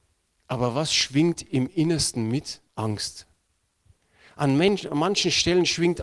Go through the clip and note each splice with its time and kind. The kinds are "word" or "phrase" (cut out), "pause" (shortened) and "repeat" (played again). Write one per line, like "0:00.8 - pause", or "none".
0:02.7 - pause